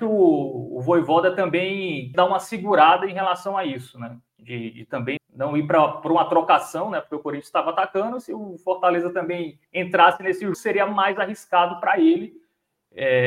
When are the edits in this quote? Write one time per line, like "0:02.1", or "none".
0:02.1
0:04.3
0:05.2
0:09.6
0:10.5